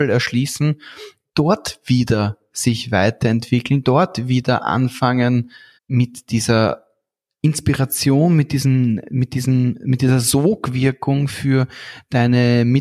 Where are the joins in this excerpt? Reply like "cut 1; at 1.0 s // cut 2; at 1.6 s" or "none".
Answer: cut 1; at 5.8 s